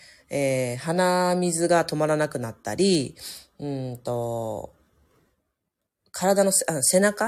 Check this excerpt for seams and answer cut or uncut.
uncut